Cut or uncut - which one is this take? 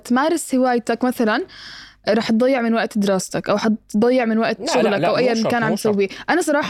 uncut